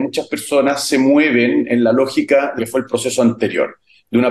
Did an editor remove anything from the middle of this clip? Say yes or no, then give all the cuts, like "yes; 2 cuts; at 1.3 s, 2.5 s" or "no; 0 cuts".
yes; 1 cut; at 2.6 s